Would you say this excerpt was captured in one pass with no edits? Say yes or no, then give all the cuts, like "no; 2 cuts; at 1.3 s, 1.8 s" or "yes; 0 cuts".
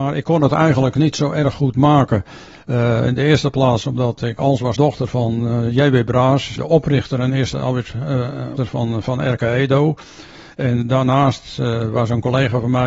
no; 4 cuts; at 4.4 s, 4.8 s, 6.6 s, 8.6 s